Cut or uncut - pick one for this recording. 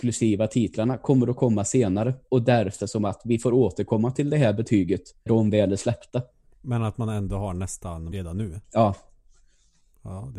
cut